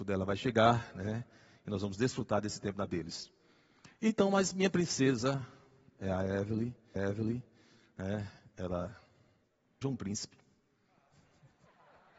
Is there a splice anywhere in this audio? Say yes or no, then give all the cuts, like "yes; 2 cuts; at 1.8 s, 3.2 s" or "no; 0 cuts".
yes; 3 cuts; at 2.9 s, 7.0 s, 9.8 s